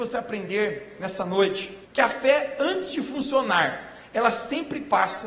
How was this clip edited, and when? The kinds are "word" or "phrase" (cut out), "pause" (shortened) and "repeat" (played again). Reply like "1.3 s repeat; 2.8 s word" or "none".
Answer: 1.8 s pause